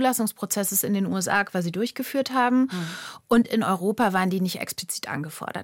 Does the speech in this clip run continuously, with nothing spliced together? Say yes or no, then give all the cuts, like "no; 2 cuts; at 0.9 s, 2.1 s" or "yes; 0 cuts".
yes; 0 cuts